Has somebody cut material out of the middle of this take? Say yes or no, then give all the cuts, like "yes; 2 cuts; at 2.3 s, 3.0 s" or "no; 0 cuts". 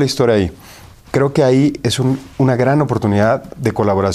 yes; 1 cut; at 2.3 s